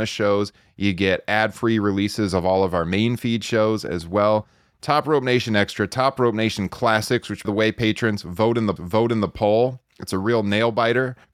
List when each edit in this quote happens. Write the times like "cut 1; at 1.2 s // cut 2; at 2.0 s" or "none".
cut 1; at 7.4 s // cut 2; at 8.8 s